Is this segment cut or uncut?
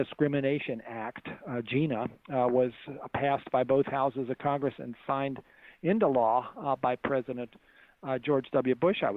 uncut